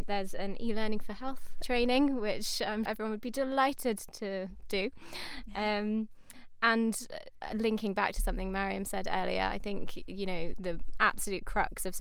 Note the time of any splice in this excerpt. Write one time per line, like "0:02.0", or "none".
0:01.6
0:02.9
0:04.1
0:10.5